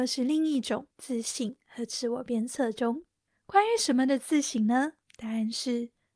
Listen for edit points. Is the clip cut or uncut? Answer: cut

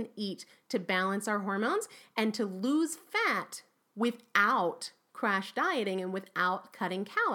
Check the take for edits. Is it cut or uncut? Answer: uncut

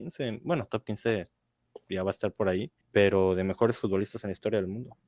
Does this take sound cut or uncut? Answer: cut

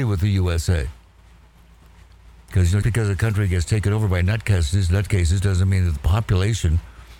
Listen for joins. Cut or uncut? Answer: cut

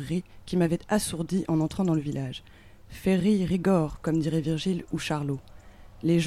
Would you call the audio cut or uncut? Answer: uncut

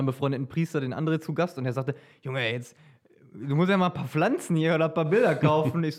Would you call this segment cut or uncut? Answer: uncut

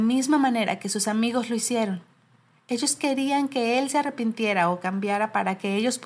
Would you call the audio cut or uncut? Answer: uncut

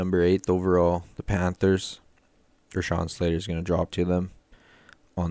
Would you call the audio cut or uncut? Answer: cut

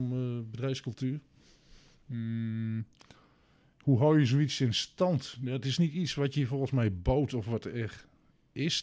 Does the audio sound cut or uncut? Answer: uncut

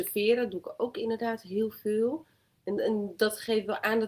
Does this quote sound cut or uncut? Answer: uncut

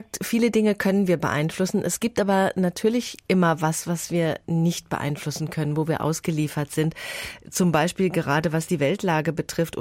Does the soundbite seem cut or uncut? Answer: uncut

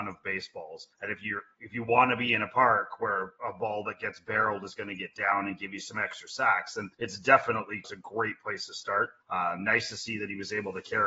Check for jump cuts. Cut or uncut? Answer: cut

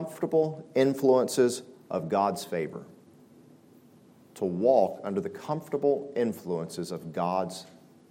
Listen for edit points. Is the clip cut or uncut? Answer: uncut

